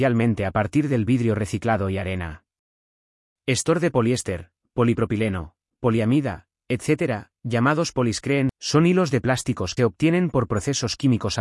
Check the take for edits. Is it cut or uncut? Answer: cut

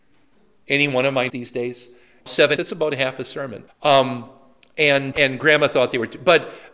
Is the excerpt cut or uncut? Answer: cut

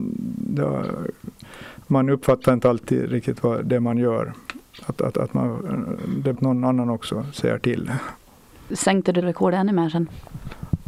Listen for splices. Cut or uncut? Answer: cut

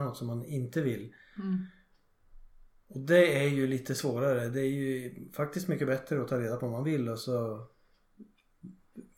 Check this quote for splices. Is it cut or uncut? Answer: uncut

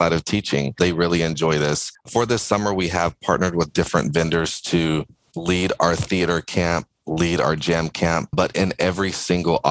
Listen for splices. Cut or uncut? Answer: uncut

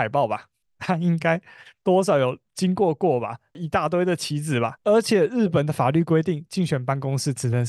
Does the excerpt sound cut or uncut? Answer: uncut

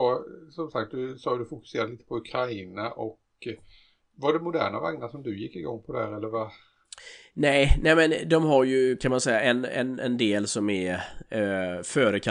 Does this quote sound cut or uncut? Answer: uncut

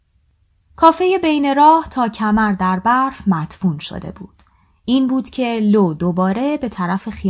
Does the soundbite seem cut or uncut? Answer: uncut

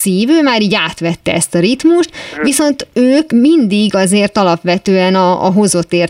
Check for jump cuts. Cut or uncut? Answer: cut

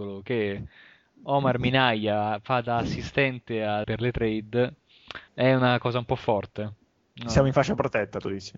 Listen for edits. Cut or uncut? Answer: cut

